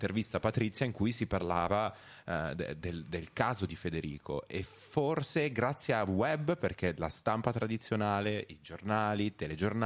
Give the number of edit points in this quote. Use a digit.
0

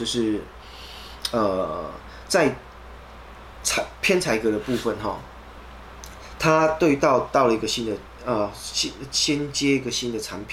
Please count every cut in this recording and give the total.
0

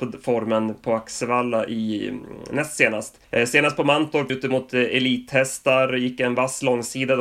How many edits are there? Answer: 2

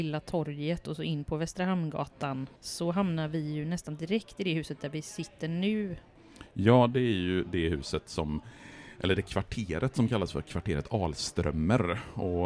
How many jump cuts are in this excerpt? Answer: 1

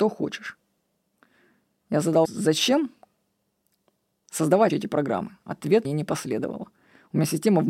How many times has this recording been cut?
3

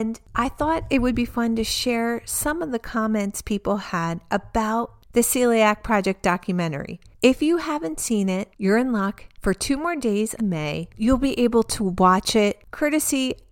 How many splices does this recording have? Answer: 1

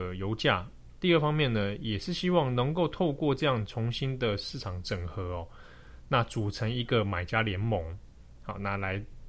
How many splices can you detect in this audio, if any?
0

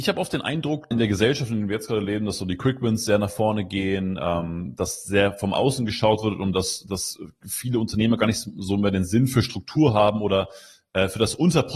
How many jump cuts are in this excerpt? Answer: 1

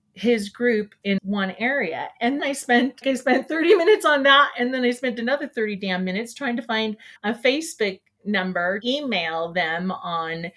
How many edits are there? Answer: 5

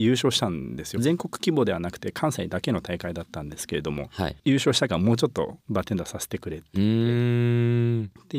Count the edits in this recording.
3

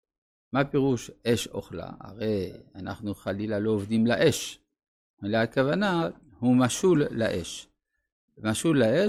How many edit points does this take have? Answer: 0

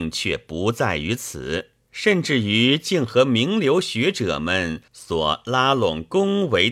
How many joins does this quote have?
1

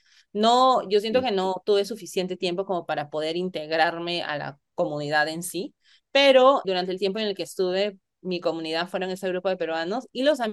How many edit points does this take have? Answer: 2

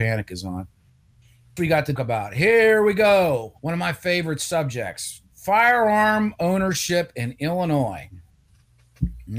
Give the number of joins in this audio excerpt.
3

